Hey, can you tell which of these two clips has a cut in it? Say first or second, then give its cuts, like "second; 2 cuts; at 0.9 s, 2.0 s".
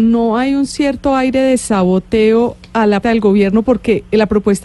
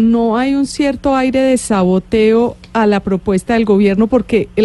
first; 1 cut; at 3.0 s